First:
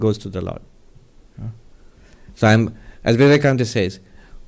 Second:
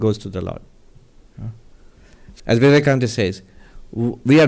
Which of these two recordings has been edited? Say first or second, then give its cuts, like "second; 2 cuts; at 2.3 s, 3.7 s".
second; 1 cut; at 2.4 s